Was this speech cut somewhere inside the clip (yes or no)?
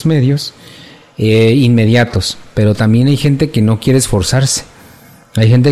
no